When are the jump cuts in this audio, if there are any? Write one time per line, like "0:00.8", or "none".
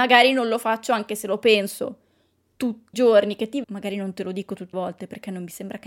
0:02.9
0:03.6
0:04.7